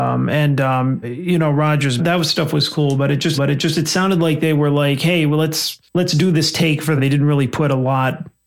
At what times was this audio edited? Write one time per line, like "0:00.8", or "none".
0:01.0
0:02.0
0:03.4
0:05.8
0:07.0